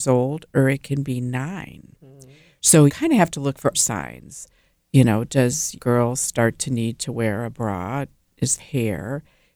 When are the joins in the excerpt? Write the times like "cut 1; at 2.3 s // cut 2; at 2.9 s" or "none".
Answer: cut 1; at 2.9 s // cut 2; at 3.7 s // cut 3; at 5.8 s // cut 4; at 8.6 s

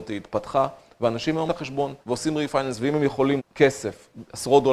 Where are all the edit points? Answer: cut 1; at 1.5 s // cut 2; at 2.0 s // cut 3; at 3.4 s

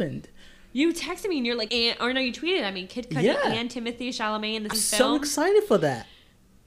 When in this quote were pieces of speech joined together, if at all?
cut 1; at 1.7 s // cut 2; at 4.7 s

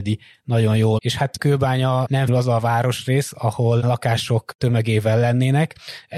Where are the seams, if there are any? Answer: cut 1; at 1.0 s // cut 2; at 1.4 s // cut 3; at 2.3 s // cut 4; at 3.8 s

